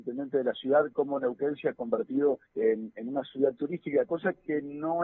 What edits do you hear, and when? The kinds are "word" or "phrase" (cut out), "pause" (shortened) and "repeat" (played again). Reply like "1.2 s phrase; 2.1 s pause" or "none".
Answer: 2.5 s pause